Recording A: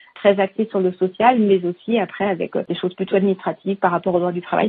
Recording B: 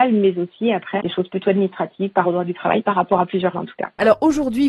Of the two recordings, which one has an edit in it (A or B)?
B